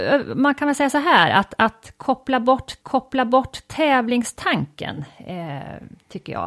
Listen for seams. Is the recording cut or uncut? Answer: cut